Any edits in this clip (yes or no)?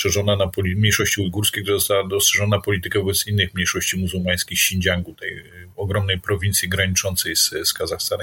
no